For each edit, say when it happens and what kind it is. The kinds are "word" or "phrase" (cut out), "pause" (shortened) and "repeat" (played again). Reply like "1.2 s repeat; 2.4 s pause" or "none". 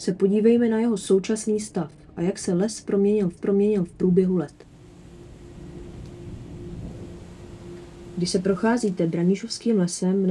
3.4 s repeat